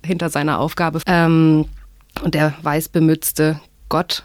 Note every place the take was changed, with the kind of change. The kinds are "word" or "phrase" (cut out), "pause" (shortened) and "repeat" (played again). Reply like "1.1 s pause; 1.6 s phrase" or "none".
1.0 s word